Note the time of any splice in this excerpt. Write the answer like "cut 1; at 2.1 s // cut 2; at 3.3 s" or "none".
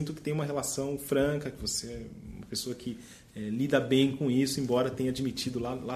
none

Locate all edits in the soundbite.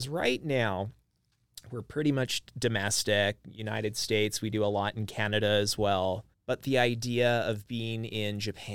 cut 1; at 6.3 s

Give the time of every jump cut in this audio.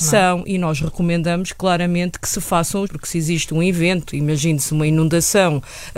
cut 1; at 2.8 s

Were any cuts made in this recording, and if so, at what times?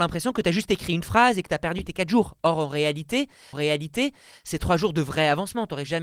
cut 1; at 3.5 s

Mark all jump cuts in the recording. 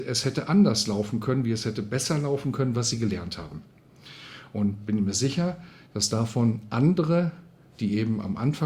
none

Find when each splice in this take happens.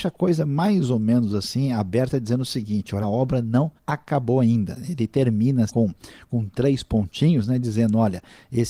cut 1; at 3.0 s // cut 2; at 3.8 s // cut 3; at 5.7 s

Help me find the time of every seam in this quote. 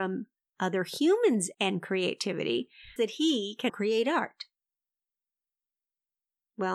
cut 1; at 1.5 s // cut 2; at 3.0 s // cut 3; at 3.7 s

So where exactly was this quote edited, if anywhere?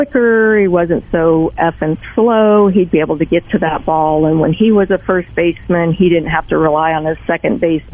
none

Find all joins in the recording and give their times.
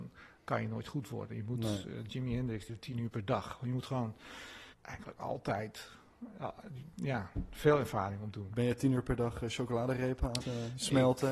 cut 1; at 2.7 s // cut 2; at 4.7 s // cut 3; at 10.4 s

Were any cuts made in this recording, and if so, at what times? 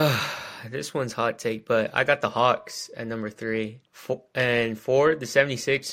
cut 1; at 3.9 s

